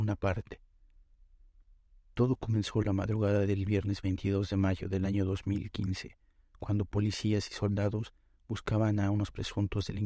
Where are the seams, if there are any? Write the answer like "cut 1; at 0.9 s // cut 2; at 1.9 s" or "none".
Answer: none